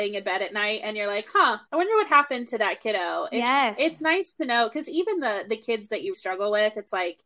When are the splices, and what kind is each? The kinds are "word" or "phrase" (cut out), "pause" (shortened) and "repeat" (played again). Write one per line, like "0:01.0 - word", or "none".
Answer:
0:01.7 - pause
0:06.1 - word